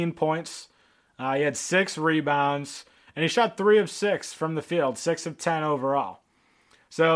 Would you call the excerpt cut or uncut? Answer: uncut